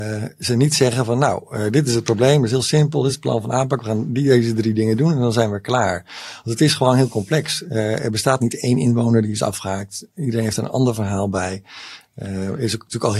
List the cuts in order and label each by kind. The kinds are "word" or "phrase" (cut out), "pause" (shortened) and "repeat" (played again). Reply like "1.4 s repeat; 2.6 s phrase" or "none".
none

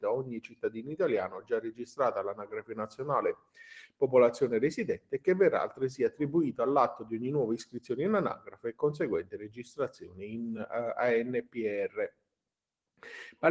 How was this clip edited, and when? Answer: none

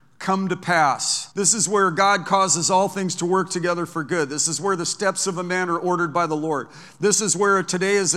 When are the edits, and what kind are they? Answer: 1.3 s pause

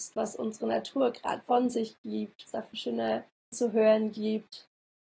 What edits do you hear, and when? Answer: 1.4 s word; 2.5 s word; 3.5 s word

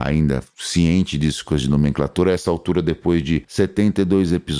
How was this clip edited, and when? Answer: 1.4 s phrase

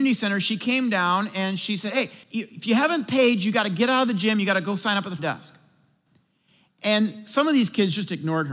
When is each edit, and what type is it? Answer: 2.2 s pause; 5.2 s word

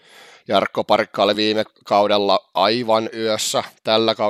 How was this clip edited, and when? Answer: none

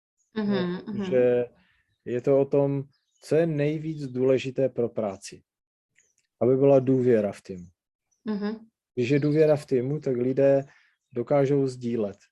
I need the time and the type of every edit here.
none

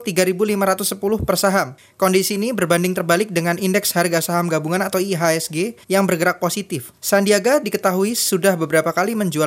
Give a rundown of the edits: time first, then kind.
5.8 s pause; 7.0 s pause

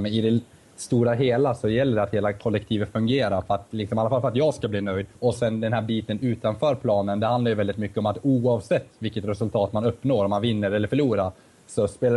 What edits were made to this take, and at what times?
5.1 s pause

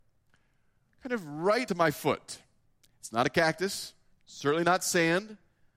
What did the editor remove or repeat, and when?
1.7 s word; 2.6 s pause; 4.1 s pause

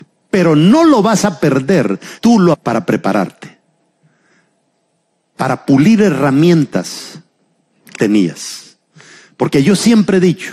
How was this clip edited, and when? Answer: 2.2 s word; 2.5 s word; 8.0 s word

